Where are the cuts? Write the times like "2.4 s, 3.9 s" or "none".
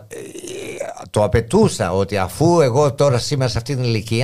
none